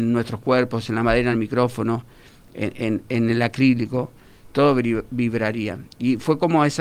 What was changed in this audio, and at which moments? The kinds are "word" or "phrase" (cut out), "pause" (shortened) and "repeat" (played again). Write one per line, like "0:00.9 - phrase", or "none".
none

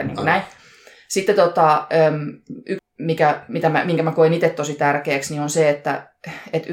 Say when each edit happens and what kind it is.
0:02.8 - word

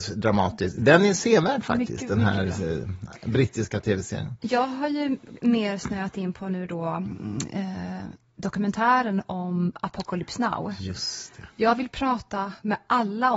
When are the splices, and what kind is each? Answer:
none

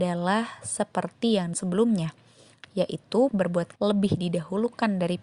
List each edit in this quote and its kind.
0:01.5 - word
0:03.3 - word
0:03.8 - word

